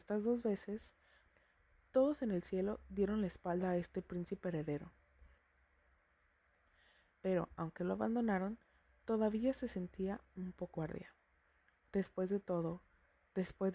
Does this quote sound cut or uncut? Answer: cut